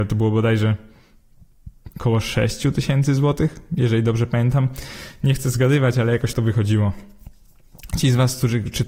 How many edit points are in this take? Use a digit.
1